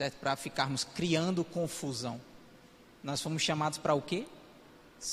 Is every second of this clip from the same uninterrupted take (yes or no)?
yes